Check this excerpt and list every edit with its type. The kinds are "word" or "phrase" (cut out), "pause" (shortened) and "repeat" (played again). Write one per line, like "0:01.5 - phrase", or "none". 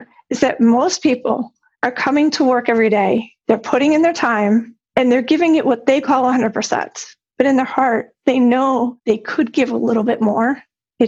none